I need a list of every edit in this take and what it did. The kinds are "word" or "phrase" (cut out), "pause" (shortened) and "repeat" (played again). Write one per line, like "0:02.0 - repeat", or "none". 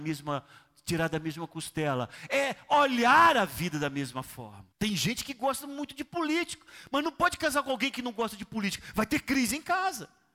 0:04.7 - pause

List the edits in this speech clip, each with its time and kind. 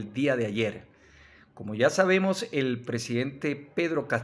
none

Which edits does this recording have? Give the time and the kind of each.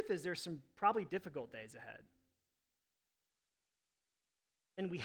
0:01.1 - word

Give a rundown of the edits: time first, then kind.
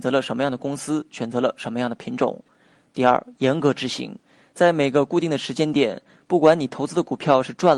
none

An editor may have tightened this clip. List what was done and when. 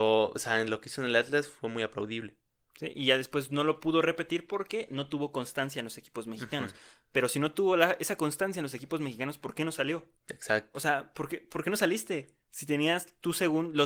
0:10.2 - pause
0:12.4 - pause

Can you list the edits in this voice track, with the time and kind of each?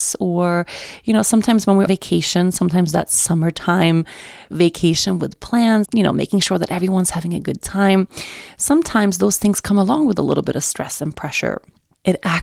0:01.9 - word
0:04.5 - word
0:05.9 - word

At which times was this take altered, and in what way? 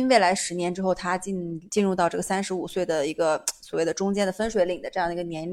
0:01.7 - pause

